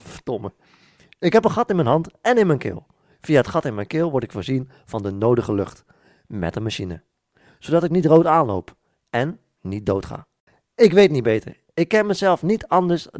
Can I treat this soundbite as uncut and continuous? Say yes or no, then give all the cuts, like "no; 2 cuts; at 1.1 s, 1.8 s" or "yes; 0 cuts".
yes; 0 cuts